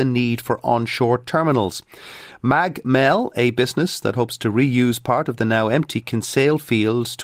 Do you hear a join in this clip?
no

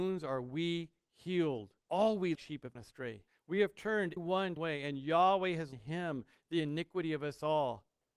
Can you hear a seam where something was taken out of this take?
yes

